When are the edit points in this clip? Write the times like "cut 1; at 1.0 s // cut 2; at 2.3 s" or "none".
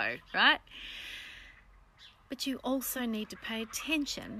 none